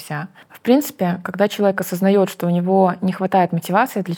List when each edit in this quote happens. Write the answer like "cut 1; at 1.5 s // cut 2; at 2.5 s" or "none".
none